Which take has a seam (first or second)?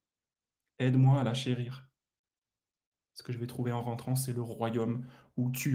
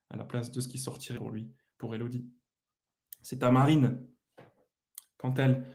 second